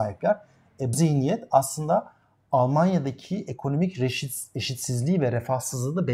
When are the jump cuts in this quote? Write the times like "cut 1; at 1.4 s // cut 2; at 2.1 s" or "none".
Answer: cut 1; at 0.9 s